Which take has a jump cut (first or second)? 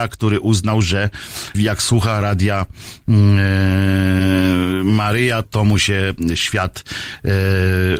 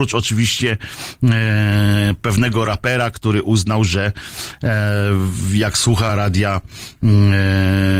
first